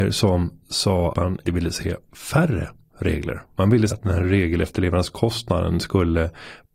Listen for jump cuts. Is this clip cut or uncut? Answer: cut